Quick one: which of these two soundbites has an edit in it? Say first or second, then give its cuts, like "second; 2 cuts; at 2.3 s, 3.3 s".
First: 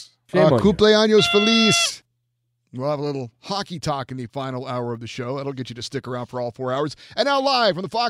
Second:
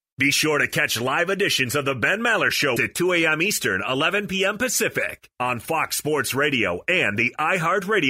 second; 1 cut; at 2.8 s